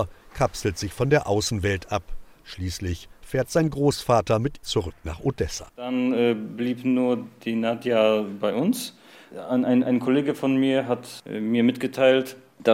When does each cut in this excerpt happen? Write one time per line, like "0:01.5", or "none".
0:04.6
0:05.7